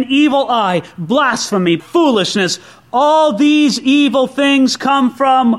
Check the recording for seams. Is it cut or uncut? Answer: cut